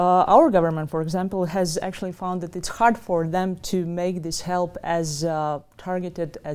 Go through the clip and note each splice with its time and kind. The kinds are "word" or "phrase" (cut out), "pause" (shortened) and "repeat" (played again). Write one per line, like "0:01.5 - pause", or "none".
none